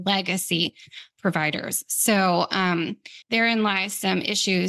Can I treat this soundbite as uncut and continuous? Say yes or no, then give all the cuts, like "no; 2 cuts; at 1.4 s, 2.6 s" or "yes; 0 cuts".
no; 2 cuts; at 1.1 s, 3.2 s